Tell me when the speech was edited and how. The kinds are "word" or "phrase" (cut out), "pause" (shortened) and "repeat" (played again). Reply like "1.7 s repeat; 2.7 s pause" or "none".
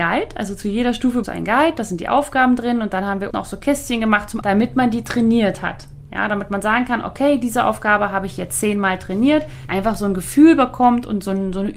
1.2 s word; 3.3 s word; 4.4 s word; 9.7 s phrase

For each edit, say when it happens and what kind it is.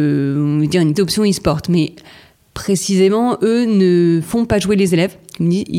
1.0 s word

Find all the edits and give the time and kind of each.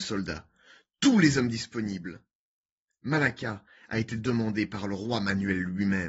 none

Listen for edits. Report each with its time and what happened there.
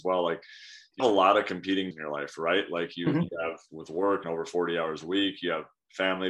1.0 s word; 1.9 s word; 3.7 s word; 4.2 s word

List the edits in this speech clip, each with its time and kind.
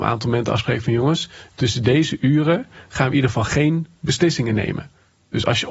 none

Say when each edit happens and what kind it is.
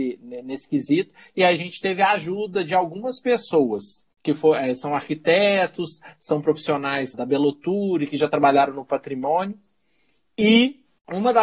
7.1 s word

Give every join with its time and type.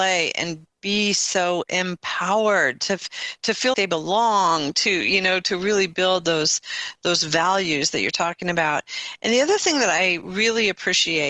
3.7 s word

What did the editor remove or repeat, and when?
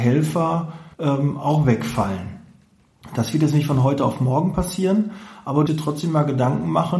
0.9 s pause; 5.7 s word

